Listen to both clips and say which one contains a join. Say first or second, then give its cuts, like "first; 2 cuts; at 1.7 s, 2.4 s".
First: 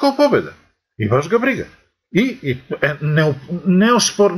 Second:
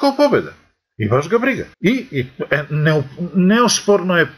second; 1 cut; at 1.7 s